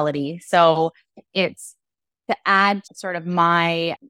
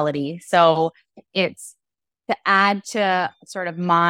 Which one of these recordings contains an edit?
first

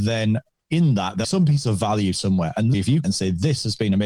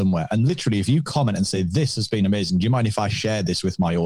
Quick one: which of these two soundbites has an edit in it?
first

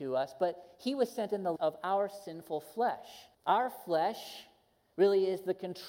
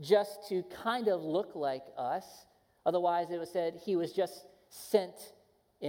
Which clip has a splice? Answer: first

